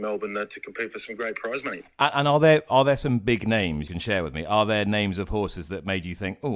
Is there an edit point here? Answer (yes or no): yes